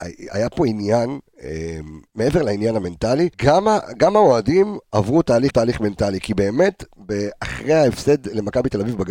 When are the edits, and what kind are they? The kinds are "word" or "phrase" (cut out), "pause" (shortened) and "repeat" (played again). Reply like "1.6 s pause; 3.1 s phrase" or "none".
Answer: 2.1 s pause; 3.3 s pause; 5.5 s word